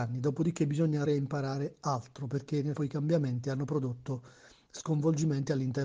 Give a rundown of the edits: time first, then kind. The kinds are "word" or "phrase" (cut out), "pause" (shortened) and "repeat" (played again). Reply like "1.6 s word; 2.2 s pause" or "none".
1.1 s word; 2.8 s word